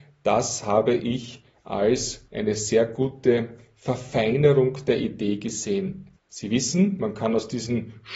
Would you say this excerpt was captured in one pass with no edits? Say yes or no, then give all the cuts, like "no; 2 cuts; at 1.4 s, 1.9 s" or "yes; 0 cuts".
no; 2 cuts; at 2.3 s, 6.2 s